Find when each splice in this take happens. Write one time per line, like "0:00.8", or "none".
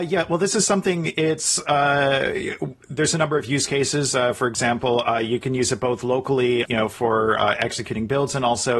0:06.7